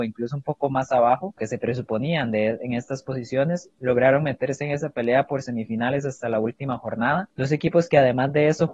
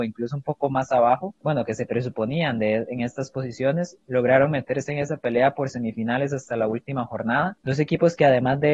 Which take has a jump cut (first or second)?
first